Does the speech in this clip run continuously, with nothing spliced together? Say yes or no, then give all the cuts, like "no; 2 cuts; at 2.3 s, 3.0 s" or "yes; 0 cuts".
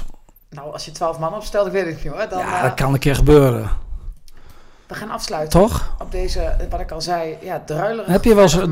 yes; 0 cuts